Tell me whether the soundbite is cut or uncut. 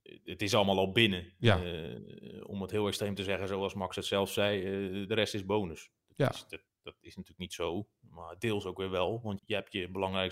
cut